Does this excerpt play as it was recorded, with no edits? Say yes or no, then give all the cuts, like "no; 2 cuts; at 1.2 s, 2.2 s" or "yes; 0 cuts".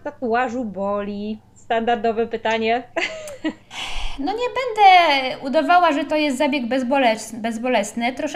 yes; 0 cuts